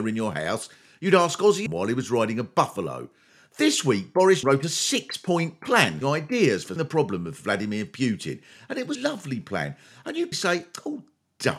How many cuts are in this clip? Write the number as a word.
six